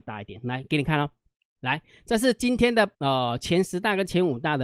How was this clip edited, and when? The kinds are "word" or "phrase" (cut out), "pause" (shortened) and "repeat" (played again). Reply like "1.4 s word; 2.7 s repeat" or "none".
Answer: 1.5 s phrase; 2.9 s pause

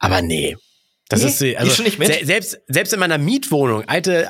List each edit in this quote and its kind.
none

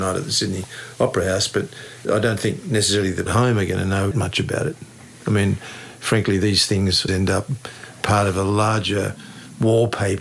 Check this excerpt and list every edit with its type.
2.0 s word; 3.3 s phrase; 4.1 s word; 7.1 s word; 8.0 s phrase

